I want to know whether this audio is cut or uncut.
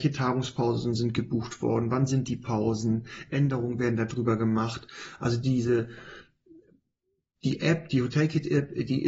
uncut